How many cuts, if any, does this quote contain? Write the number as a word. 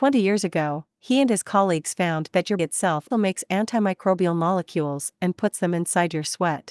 two